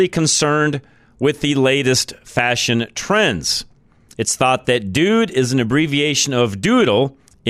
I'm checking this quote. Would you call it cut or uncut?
uncut